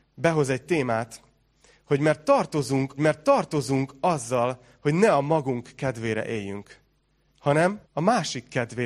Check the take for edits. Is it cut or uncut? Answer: cut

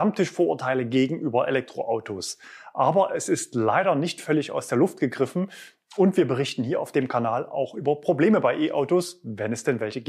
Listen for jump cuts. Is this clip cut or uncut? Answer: uncut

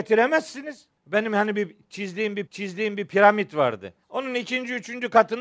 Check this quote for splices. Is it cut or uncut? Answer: cut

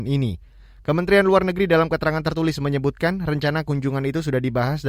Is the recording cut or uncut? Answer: uncut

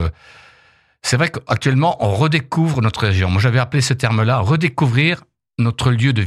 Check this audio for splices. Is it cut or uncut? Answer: uncut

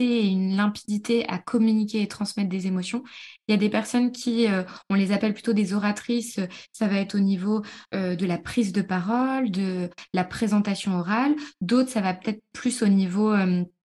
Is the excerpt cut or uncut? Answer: cut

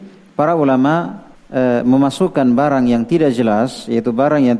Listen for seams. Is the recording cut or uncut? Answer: cut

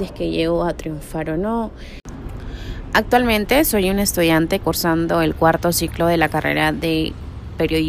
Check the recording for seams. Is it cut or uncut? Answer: cut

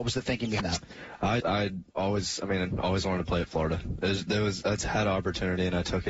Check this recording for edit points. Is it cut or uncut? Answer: cut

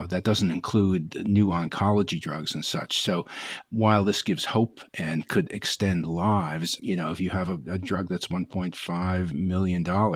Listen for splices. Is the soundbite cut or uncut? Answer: uncut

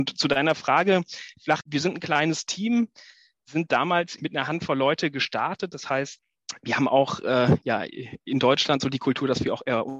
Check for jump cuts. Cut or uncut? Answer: cut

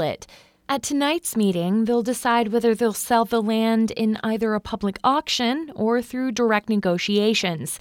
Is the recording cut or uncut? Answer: uncut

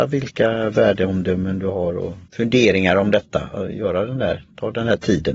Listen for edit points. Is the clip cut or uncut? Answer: cut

